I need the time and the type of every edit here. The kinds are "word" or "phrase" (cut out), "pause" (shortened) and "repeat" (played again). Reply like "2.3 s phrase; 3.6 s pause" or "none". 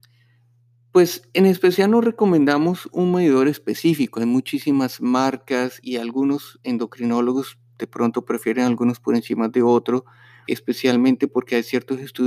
5.8 s word; 10.5 s word